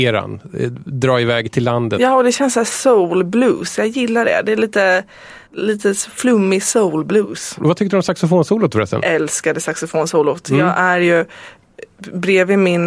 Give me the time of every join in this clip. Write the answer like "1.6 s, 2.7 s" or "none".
5.5 s